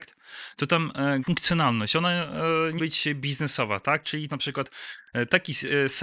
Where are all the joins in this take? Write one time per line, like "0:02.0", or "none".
0:01.2
0:02.8
0:04.3